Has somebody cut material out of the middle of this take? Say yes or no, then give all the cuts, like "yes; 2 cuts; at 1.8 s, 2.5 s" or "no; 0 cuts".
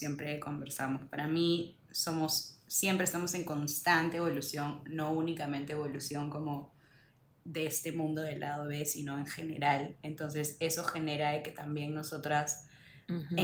no; 0 cuts